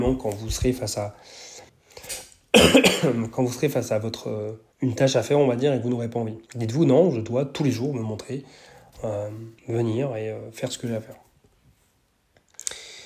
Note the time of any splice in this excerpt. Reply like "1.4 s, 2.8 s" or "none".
1.7 s, 4.7 s, 6.5 s, 9.6 s